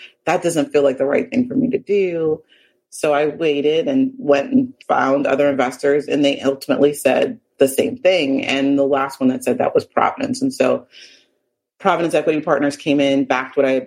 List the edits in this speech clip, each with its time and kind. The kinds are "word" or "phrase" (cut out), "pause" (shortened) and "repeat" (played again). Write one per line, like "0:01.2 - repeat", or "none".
0:04.8 - pause